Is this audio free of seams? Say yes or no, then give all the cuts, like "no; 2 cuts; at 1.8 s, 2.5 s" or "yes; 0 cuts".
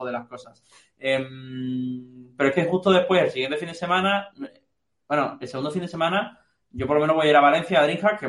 yes; 0 cuts